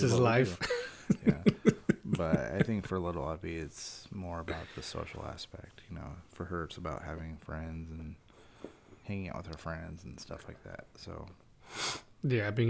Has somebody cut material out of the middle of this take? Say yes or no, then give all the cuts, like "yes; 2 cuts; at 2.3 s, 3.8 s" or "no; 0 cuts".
no; 0 cuts